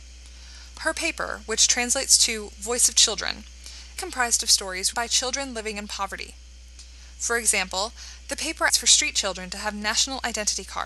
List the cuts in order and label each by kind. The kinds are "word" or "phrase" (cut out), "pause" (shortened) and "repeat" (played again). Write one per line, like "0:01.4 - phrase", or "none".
0:04.0 - phrase
0:04.9 - word
0:08.7 - word